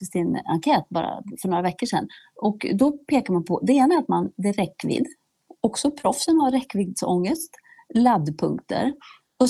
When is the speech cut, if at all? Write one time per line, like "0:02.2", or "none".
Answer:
none

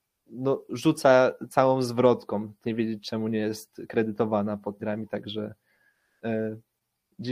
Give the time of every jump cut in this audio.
0:02.6
0:04.8

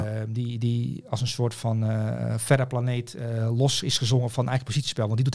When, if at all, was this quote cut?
none

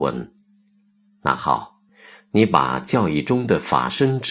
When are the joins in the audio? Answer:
none

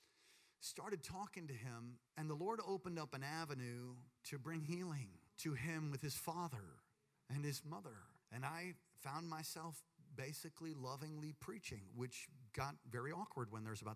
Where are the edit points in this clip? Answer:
0:02.1
0:04.2
0:05.3
0:07.1
0:08.2

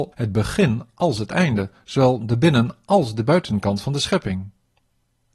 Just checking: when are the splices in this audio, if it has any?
none

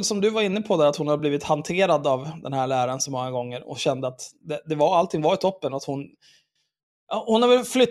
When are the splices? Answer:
none

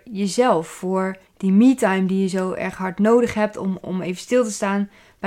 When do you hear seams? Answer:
0:01.3

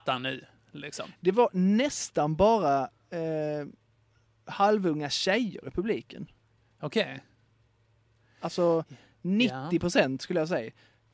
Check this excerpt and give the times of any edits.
none

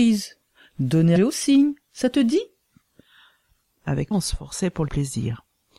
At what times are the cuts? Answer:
0:01.2
0:04.1
0:04.9

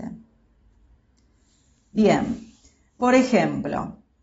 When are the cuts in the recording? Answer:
none

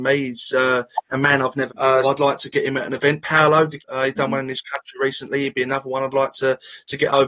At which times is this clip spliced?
0:01.1
0:01.7
0:02.0
0:03.8

